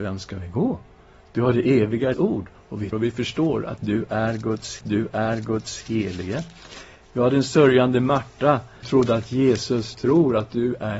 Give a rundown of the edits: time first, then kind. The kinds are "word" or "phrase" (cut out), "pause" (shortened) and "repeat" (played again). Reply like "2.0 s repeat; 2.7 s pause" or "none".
2.1 s word; 2.9 s word; 4.8 s repeat; 8.8 s phrase; 9.9 s word

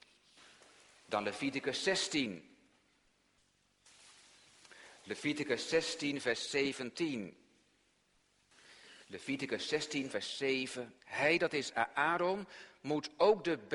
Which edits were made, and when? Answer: 6.9 s word; 9.0 s pause; 10.1 s word; 11.0 s pause

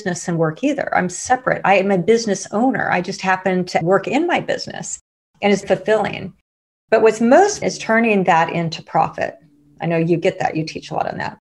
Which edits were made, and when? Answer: 3.8 s word; 5.6 s word; 7.6 s word

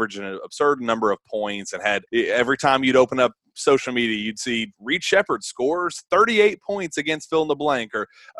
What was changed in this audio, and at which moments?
2.1 s pause

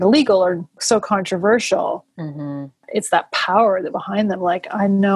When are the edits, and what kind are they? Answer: 3.9 s word

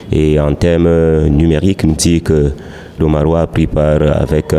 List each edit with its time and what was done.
2.0 s word; 3.0 s word

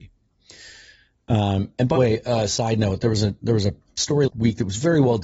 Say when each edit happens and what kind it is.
2.0 s word; 4.3 s word

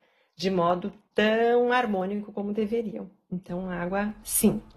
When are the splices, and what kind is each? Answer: none

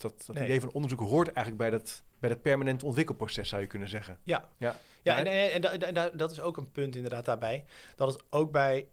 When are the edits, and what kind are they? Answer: 2.1 s pause; 4.5 s pause

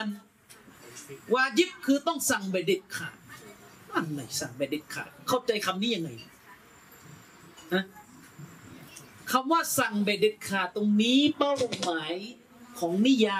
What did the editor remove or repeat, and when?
none

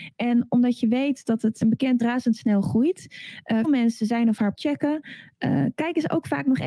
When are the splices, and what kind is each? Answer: 1.6 s word; 2.0 s phrase; 3.6 s word; 4.5 s word

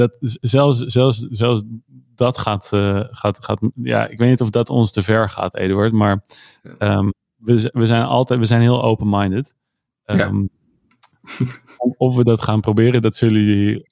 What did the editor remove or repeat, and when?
none

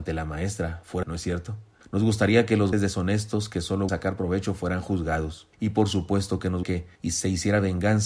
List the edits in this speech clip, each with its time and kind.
1.0 s word; 1.8 s pause; 2.7 s word; 3.9 s word; 5.5 s pause; 6.6 s word; 7.0 s pause

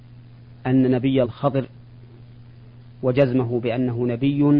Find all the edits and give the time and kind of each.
1.2 s word

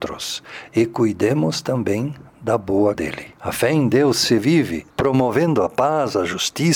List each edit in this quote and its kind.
2.9 s word; 3.4 s pause; 4.9 s pause

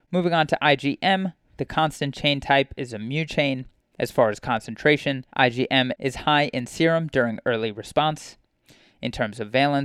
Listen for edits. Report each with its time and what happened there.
5.3 s pause

